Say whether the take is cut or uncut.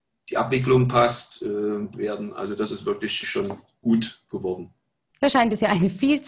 cut